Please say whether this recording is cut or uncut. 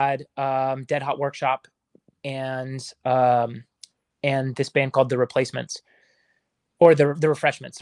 uncut